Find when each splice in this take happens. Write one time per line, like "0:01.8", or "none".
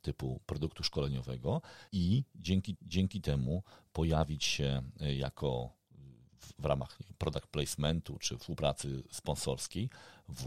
0:01.9
0:02.8
0:08.4